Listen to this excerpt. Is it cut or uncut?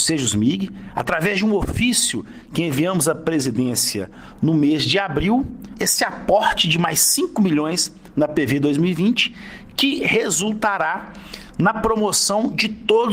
uncut